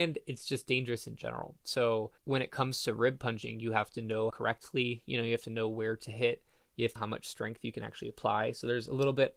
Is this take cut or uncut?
cut